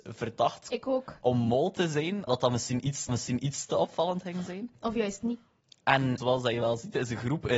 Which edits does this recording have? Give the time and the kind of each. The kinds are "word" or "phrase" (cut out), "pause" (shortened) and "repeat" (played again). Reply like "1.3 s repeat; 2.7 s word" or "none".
2.3 s word; 3.1 s repeat